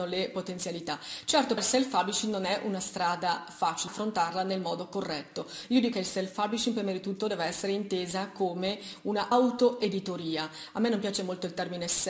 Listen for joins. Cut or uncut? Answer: cut